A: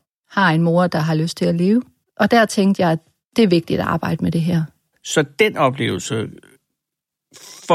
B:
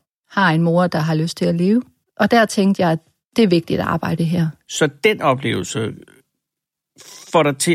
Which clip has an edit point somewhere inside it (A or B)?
B